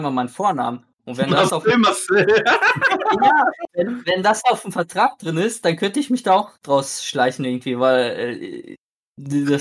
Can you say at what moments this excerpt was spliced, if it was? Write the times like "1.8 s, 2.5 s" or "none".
none